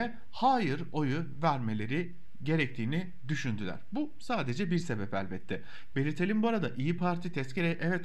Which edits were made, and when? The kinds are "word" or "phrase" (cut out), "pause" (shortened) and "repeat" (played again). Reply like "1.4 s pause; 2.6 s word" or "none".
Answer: none